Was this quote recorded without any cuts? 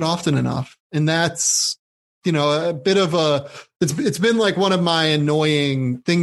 yes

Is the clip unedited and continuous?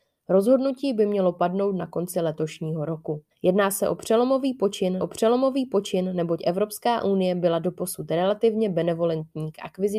no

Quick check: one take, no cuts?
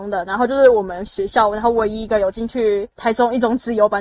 no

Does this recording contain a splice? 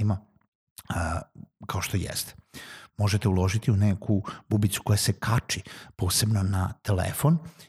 no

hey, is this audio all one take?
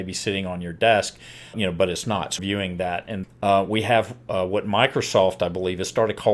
no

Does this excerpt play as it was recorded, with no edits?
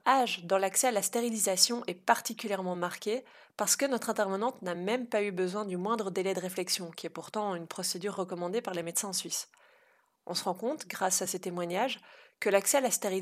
yes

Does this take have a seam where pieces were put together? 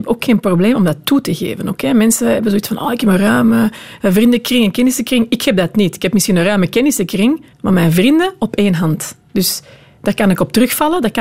yes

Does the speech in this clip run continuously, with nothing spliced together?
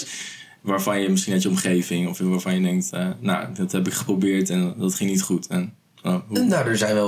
yes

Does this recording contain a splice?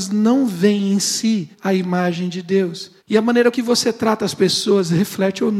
yes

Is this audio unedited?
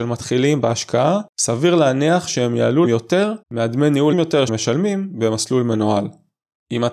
no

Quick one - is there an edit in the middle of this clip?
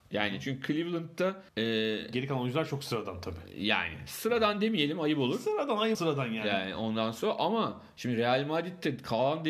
yes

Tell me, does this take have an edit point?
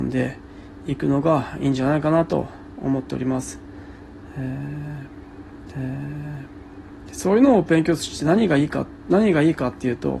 yes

